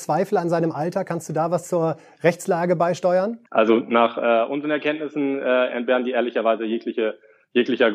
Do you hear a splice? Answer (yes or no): yes